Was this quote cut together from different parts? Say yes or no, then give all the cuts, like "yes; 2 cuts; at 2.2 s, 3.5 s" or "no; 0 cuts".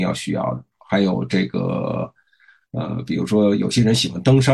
no; 0 cuts